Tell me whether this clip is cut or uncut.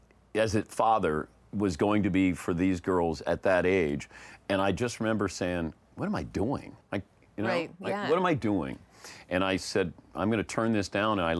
cut